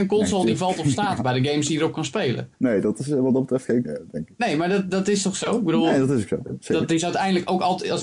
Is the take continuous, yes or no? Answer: no